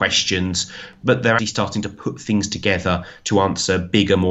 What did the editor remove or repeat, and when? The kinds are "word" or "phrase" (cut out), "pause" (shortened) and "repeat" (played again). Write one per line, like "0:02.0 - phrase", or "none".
0:01.4 - word